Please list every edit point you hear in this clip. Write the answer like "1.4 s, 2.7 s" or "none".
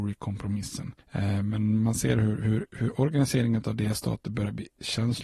2.7 s